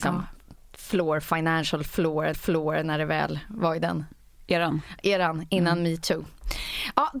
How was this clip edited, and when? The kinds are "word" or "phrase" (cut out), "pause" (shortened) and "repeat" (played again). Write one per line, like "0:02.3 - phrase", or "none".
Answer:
0:02.3 - repeat